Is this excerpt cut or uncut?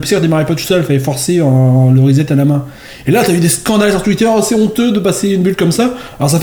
uncut